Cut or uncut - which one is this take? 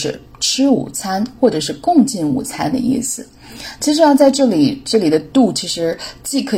uncut